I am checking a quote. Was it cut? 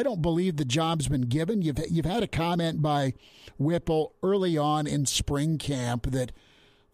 no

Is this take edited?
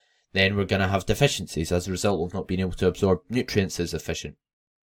no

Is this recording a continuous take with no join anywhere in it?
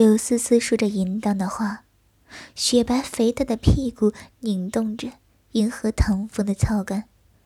yes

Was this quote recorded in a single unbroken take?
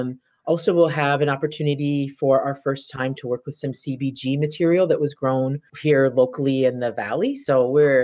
no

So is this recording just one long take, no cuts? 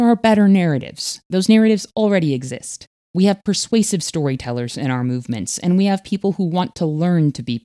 no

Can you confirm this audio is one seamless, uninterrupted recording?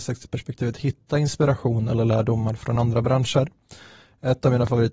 yes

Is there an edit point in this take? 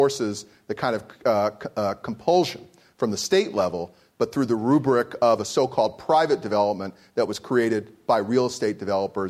no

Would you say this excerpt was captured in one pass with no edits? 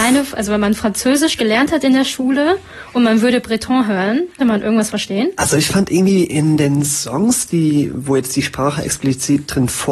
no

